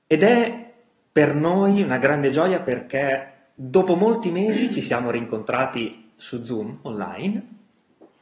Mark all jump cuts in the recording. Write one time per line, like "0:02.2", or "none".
none